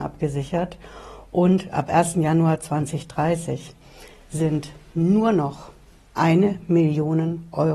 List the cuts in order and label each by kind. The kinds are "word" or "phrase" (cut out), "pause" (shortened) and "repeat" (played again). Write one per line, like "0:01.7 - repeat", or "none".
none